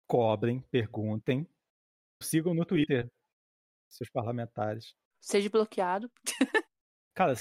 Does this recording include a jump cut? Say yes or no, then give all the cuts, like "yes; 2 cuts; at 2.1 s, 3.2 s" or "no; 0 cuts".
yes; 1 cut; at 2.2 s